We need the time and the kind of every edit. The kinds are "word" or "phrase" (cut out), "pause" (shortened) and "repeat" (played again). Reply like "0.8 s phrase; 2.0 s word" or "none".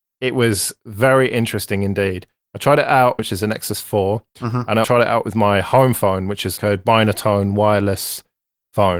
3.2 s phrase; 4.3 s pause; 4.8 s word; 6.6 s word